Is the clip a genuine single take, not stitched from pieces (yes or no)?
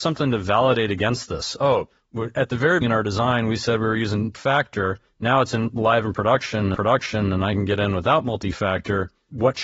no